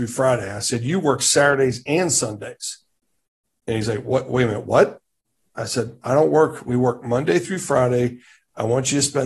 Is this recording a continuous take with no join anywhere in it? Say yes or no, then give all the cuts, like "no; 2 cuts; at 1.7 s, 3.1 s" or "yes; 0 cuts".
yes; 0 cuts